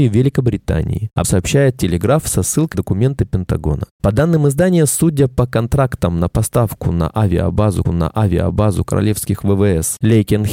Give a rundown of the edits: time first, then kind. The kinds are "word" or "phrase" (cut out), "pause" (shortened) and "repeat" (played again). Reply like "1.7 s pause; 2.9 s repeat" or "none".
1.2 s word; 2.7 s word; 7.8 s repeat